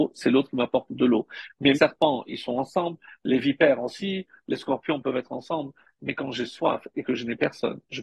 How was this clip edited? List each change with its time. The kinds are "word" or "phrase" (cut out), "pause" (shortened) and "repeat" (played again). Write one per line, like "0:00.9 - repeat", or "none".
0:01.7 - phrase

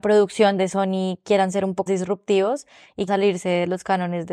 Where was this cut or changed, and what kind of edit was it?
0:01.9 - word
0:03.1 - word

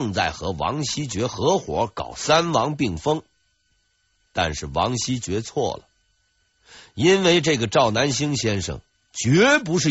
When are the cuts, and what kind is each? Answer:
none

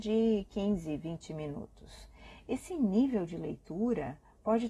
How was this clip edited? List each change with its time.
none

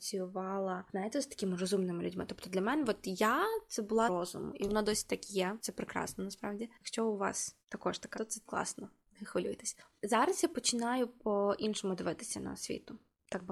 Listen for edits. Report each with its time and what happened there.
0:04.1 - word
0:07.6 - pause
0:08.1 - word

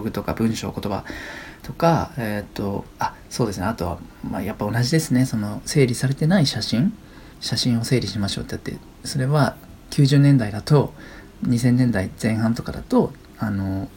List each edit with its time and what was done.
0:07.3 - pause

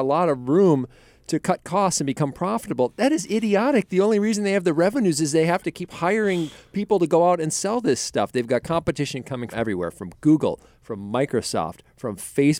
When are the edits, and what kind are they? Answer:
0:09.5 - word

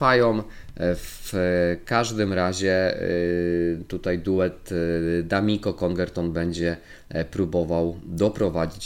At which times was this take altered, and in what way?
none

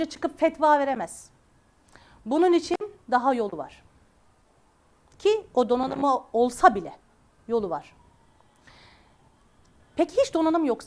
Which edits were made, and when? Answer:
none

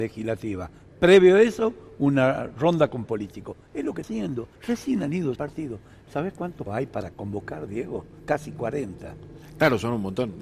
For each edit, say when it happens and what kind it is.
0:03.1 - word
0:04.0 - word
0:04.6 - pause
0:05.4 - word
0:06.7 - word

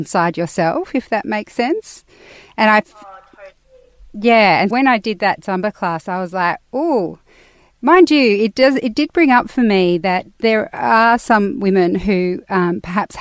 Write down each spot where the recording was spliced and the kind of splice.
0:04.7 - word

